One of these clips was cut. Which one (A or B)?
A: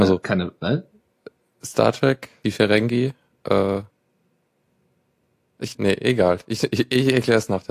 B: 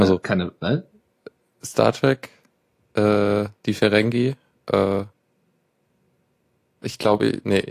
A